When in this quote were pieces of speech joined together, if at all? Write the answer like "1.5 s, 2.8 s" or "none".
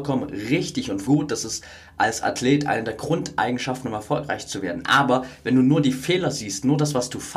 1.0 s

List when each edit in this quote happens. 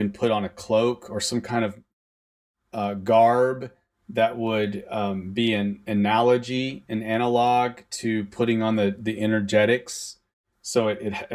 none

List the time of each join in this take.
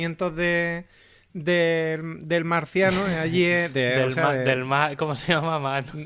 none

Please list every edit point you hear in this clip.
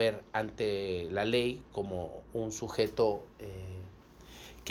3.3 s

